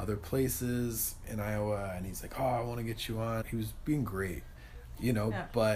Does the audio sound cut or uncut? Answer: cut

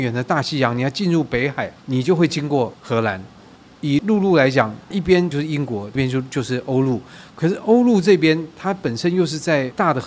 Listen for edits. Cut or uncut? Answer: cut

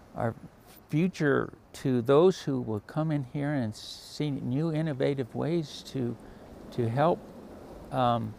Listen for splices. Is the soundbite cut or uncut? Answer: uncut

